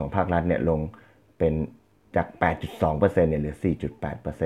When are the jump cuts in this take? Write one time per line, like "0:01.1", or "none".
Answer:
none